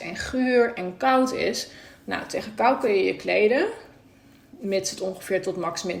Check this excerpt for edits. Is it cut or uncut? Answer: uncut